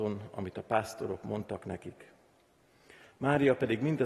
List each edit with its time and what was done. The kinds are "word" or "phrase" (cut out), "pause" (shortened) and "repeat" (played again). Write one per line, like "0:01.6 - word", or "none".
none